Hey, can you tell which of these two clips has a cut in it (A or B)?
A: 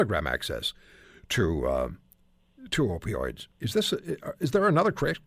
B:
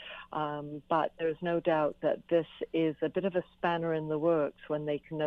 A